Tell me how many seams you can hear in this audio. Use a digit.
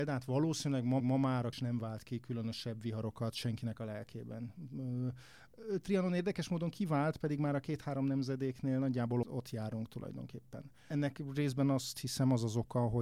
3